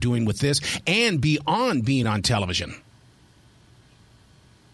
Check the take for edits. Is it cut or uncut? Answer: uncut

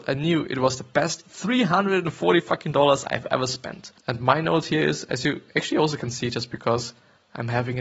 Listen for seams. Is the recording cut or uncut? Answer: cut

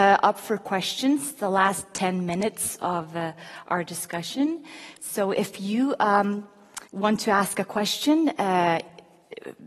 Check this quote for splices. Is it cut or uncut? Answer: cut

